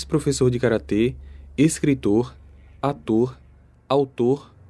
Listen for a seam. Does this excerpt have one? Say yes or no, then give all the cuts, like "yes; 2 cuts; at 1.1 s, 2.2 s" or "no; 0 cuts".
no; 0 cuts